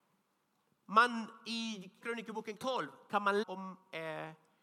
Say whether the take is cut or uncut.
cut